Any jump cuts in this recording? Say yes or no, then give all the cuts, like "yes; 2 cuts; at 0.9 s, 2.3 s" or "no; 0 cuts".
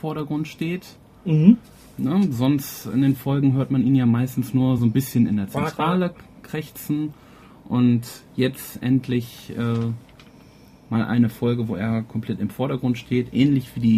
no; 0 cuts